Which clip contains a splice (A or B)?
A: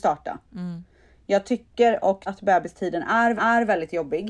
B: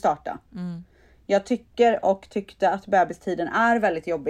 A